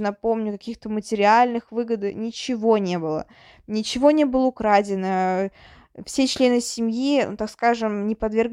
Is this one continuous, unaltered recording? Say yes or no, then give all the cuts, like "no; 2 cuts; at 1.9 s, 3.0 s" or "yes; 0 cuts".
yes; 0 cuts